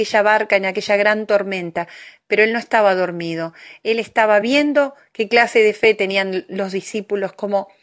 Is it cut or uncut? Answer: uncut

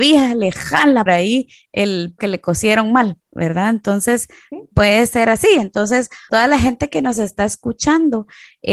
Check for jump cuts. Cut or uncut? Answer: cut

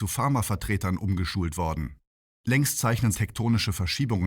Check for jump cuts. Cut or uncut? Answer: cut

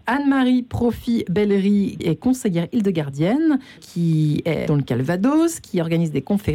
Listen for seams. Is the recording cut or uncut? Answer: cut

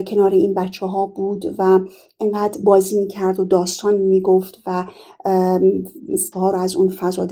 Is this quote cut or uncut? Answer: cut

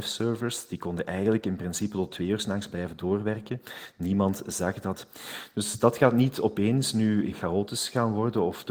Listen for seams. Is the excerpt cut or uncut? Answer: cut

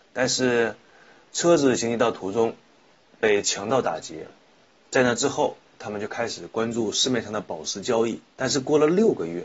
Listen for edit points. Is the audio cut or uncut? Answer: cut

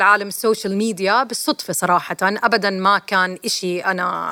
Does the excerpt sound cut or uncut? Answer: uncut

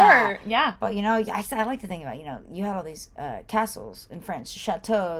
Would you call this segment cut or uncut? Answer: uncut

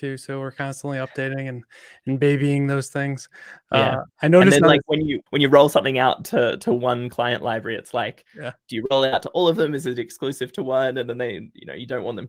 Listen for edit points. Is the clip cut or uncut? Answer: cut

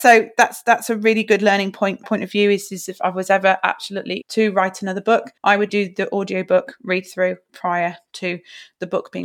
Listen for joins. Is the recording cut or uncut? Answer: cut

